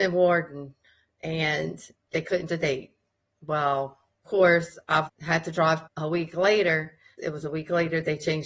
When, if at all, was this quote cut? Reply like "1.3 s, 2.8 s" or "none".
1.9 s, 2.5 s, 4.2 s, 5.1 s, 5.9 s, 7.2 s